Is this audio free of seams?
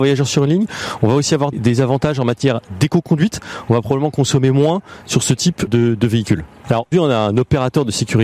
no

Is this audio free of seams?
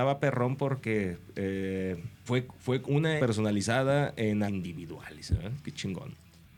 no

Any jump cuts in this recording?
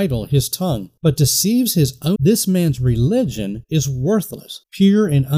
yes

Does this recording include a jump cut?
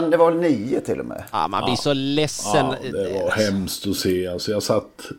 no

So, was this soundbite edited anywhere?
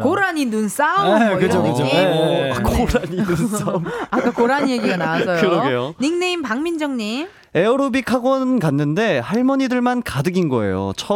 no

